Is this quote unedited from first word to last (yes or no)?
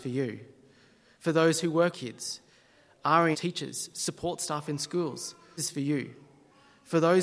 no